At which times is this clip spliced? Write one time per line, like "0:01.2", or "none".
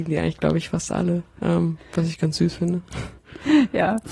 none